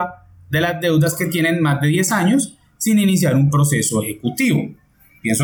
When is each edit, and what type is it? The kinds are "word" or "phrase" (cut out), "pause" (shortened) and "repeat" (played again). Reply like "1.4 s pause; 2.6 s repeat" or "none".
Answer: none